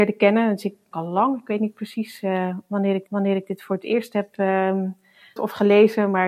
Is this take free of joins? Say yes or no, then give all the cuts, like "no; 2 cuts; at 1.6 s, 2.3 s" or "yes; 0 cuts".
no; 3 cuts; at 0.9 s, 3.1 s, 5.4 s